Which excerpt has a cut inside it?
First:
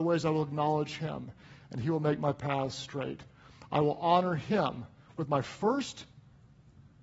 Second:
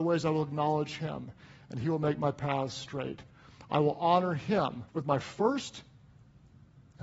second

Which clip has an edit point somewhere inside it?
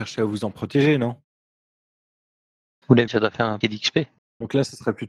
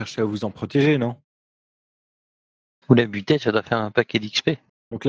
first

